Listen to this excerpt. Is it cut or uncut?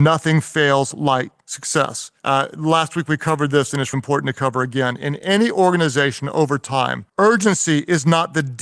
cut